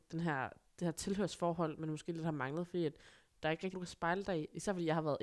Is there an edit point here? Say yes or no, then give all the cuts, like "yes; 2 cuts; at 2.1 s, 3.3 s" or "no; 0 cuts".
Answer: yes; 1 cut; at 3.7 s